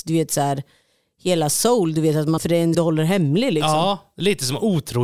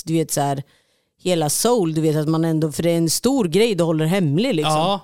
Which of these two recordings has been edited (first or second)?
first